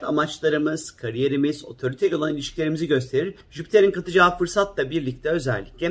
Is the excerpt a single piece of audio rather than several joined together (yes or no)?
no